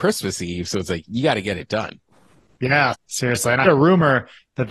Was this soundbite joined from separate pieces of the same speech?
yes; 3 cuts; at 1.1 s, 2.9 s, 3.6 s

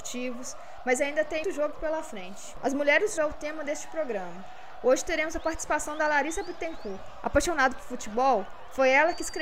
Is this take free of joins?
no; 2 cuts; at 1.4 s, 3.2 s

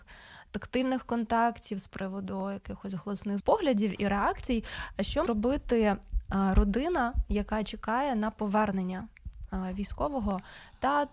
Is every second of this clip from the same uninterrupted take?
no; 2 cuts; at 3.4 s, 5.3 s

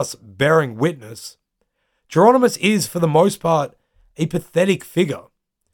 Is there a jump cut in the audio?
no; 0 cuts

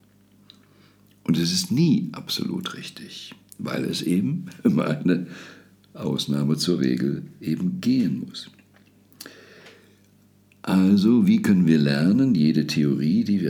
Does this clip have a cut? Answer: no; 0 cuts

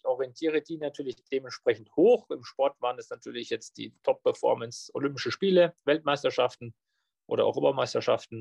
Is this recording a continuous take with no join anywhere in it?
yes; 0 cuts

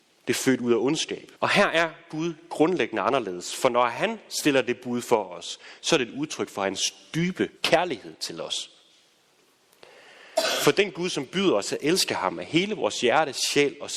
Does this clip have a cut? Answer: yes; 2 cuts; at 1.4 s, 7.6 s

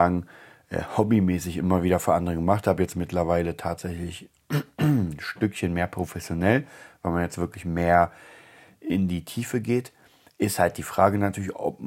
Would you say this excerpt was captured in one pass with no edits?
yes; 0 cuts

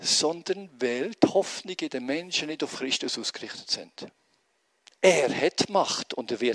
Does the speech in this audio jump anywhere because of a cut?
no; 0 cuts

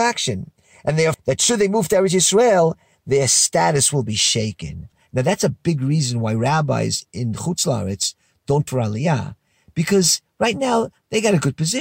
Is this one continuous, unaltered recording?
no; 2 cuts; at 1.1 s, 8.7 s

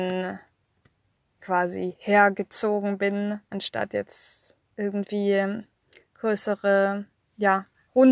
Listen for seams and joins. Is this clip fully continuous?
no; 2 cuts; at 1.4 s, 3.4 s

